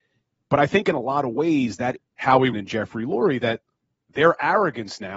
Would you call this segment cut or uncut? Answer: cut